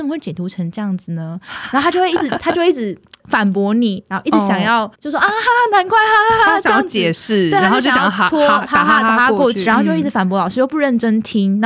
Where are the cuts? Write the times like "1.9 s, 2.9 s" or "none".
3.2 s, 4.9 s, 9.7 s